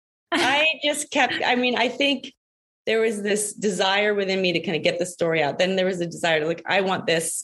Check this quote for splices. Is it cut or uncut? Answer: uncut